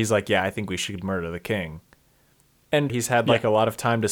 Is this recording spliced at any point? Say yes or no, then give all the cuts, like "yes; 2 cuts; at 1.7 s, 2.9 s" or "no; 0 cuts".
yes; 1 cut; at 2.9 s